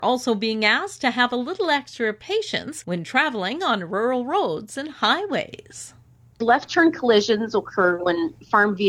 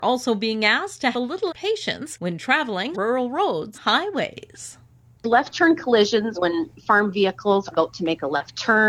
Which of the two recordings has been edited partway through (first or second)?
second